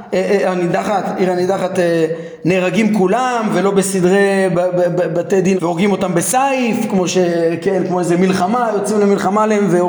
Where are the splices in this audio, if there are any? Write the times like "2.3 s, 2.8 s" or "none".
5.6 s